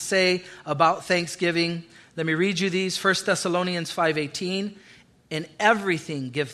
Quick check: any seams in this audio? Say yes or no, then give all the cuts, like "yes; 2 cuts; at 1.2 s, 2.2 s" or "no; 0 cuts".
no; 0 cuts